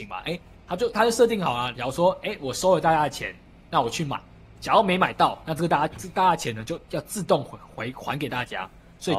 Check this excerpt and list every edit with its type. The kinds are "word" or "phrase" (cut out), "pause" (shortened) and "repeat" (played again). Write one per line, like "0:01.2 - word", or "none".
none